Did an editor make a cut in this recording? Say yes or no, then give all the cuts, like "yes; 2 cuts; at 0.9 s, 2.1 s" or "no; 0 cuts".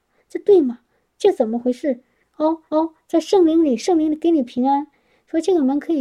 yes; 2 cuts; at 2.2 s, 2.7 s